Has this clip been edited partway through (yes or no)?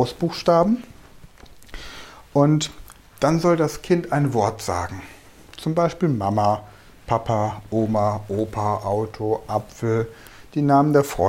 no